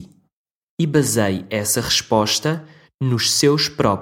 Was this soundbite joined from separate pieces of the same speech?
no; 0 cuts

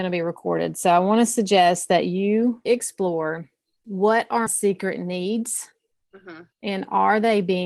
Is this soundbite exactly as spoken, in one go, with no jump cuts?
no; 3 cuts; at 2.7 s, 4.5 s, 6.5 s

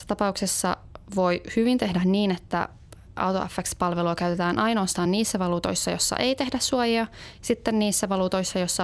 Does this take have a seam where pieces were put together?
no; 0 cuts

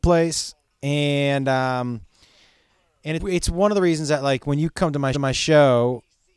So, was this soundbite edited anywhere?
yes; 2 cuts; at 3.2 s, 5.1 s

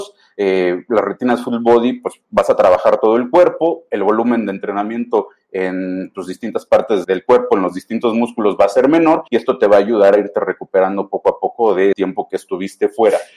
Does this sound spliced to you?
yes; 3 cuts; at 7.0 s, 9.3 s, 11.9 s

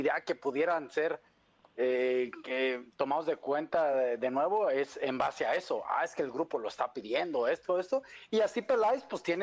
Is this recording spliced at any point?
no; 0 cuts

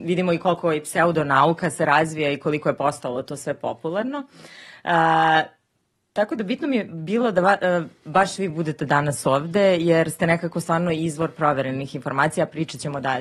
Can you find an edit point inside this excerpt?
no; 0 cuts

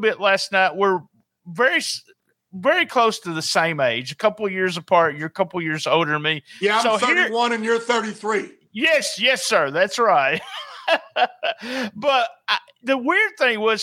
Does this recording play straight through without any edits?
yes; 0 cuts

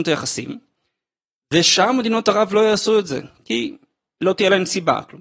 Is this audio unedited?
yes; 0 cuts

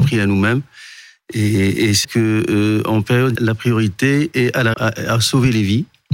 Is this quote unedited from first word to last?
no; 3 cuts; at 2.0 s, 3.4 s, 4.7 s

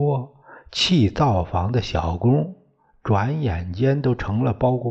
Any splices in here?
no; 0 cuts

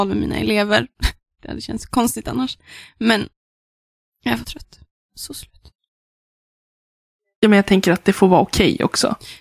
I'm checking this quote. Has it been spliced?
yes; 1 cut; at 4.4 s

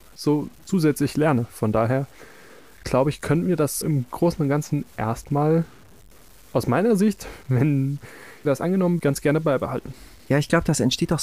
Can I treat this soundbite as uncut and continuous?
no; 3 cuts; at 3.8 s, 8.4 s, 9.0 s

